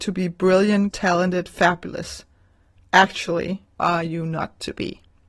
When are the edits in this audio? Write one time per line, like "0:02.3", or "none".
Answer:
0:00.9
0:03.8